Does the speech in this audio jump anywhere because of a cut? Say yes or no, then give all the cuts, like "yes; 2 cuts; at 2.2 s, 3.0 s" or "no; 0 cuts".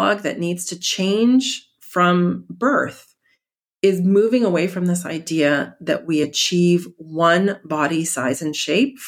no; 0 cuts